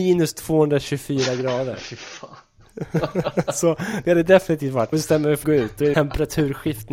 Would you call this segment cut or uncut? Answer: cut